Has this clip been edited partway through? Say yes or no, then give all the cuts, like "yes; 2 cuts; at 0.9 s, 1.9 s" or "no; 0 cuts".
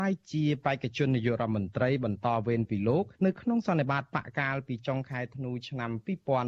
yes; 1 cut; at 3.1 s